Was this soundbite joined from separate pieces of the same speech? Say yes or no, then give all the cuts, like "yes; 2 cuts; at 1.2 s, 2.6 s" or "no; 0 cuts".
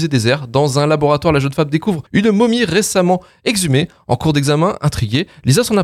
yes; 1 cut; at 2.1 s